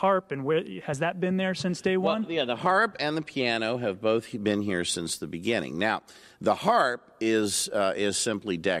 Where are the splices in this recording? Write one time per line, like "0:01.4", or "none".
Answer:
none